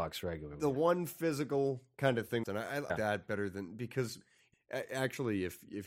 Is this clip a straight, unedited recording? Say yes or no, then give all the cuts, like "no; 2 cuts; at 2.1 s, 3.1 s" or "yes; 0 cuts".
no; 3 cuts; at 2.4 s, 2.9 s, 4.5 s